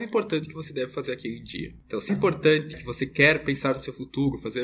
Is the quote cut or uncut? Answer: cut